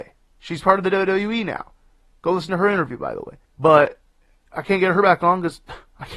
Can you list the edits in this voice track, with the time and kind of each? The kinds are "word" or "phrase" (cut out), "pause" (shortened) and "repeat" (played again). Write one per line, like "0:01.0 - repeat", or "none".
0:03.5 - pause